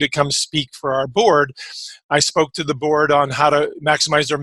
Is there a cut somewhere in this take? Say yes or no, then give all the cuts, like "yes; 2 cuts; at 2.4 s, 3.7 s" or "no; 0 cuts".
no; 0 cuts